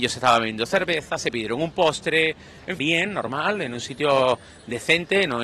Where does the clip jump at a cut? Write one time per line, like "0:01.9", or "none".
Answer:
0:02.8